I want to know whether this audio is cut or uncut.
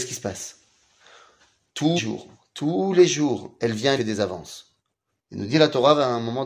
cut